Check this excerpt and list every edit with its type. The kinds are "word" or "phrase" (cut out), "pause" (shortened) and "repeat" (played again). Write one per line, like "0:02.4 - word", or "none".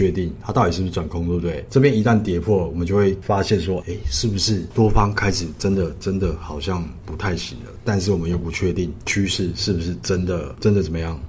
none